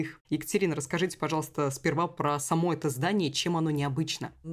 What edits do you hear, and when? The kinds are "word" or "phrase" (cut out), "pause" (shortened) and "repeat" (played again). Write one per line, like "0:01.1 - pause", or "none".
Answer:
none